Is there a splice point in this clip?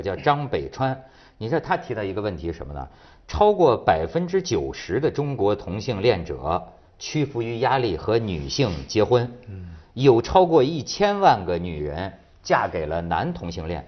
no; 0 cuts

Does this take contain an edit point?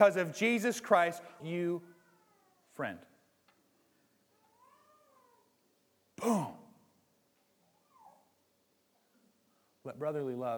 yes; 1 cut; at 1.4 s

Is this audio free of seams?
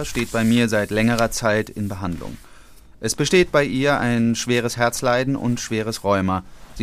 yes; 0 cuts

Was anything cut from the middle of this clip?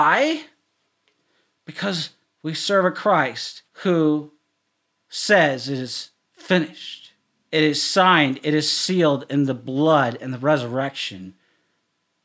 yes; 2 cuts; at 3.7 s, 7.2 s

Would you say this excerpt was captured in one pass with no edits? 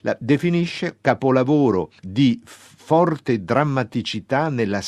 no; 1 cut; at 2.0 s

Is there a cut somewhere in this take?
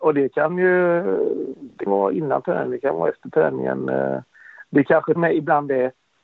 yes; 2 cuts; at 1.9 s, 5.2 s

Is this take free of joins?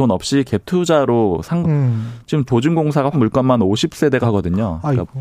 no; 4 cuts; at 1.6 s, 2.5 s, 3.1 s, 4.2 s

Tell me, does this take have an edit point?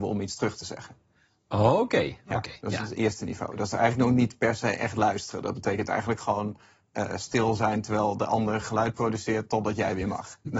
no; 0 cuts

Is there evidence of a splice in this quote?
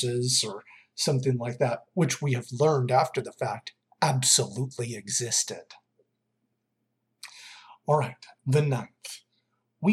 no; 0 cuts

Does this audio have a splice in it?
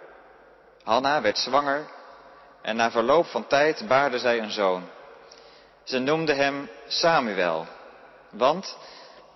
no; 0 cuts

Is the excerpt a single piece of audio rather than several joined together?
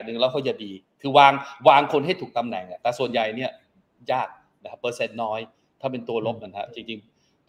yes; 0 cuts

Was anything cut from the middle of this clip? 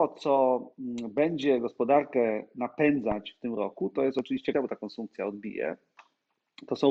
yes; 1 cut; at 4.5 s

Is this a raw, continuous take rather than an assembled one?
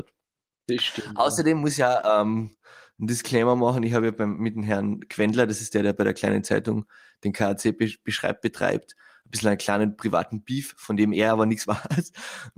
yes; 0 cuts

